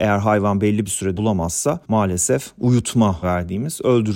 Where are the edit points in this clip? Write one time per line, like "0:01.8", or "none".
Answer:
0:01.2
0:01.8
0:03.2